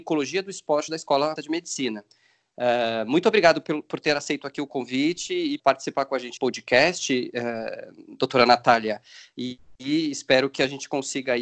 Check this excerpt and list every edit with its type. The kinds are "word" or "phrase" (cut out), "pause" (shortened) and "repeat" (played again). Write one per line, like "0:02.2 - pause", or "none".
0:01.4 - word
0:05.6 - word
0:06.4 - word